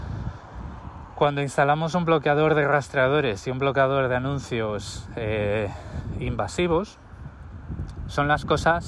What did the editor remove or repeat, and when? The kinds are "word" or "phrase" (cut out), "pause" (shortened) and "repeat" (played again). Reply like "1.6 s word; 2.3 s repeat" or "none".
none